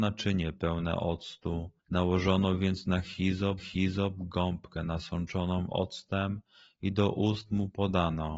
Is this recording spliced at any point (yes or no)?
yes